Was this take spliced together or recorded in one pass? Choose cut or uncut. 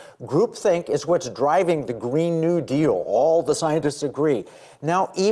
uncut